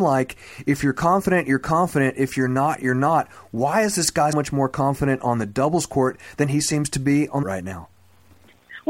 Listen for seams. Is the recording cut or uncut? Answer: cut